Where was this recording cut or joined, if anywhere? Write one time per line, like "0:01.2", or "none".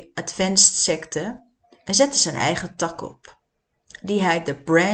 none